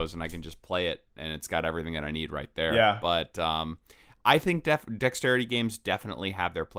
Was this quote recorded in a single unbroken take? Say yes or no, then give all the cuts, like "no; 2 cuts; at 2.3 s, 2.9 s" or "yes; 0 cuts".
yes; 0 cuts